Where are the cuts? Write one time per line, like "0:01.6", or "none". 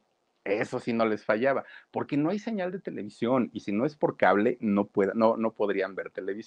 none